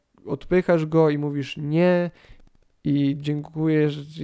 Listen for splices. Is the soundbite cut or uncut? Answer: uncut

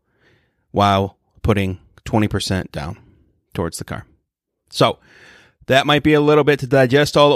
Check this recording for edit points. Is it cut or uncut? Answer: uncut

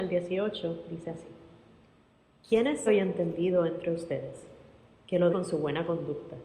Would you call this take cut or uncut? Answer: cut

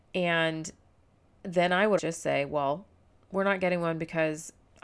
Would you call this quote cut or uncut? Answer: cut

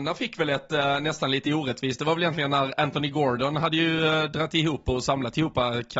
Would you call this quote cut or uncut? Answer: uncut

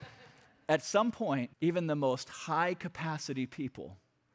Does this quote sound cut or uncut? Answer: cut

